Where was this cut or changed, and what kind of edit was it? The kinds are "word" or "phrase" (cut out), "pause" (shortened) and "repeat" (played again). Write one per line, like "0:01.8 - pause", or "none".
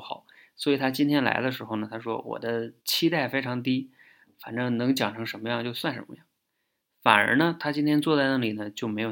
0:02.8 - pause